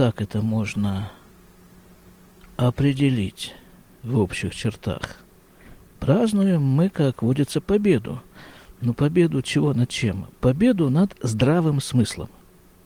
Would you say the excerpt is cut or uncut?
uncut